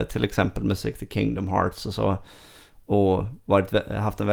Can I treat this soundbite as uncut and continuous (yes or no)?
yes